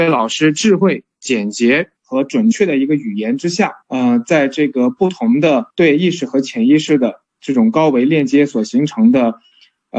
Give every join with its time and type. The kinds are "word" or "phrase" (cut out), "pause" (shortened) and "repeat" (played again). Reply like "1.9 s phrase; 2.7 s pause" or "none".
2.0 s pause; 3.8 s pause; 5.7 s pause